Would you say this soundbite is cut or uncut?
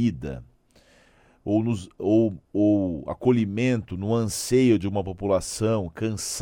uncut